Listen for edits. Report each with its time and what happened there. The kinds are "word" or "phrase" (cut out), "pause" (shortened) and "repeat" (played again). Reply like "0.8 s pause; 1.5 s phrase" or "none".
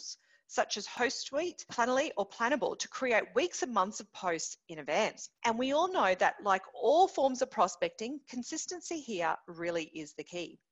5.3 s pause